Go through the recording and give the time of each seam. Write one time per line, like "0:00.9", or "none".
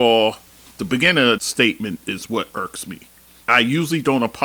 0:01.4